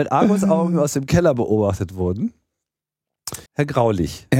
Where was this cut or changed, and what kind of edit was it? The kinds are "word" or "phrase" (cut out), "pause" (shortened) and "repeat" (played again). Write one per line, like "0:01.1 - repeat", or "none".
0:03.5 - pause